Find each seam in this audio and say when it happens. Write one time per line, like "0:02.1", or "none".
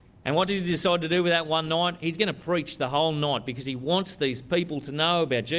none